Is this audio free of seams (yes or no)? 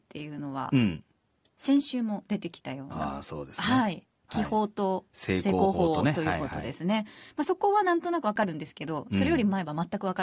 yes